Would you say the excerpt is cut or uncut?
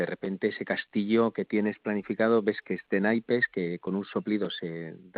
uncut